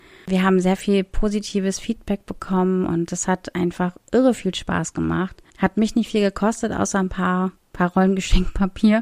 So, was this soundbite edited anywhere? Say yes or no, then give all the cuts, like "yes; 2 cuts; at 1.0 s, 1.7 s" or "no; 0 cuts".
yes; 1 cut; at 5.5 s